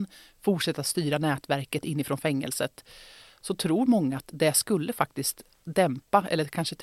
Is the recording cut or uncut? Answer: uncut